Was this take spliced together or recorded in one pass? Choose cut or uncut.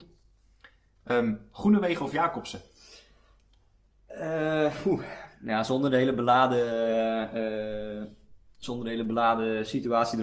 uncut